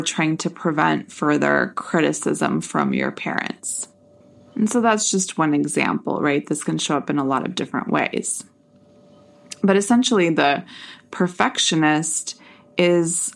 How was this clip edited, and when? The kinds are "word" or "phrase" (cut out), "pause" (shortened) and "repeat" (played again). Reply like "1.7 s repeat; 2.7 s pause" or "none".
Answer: none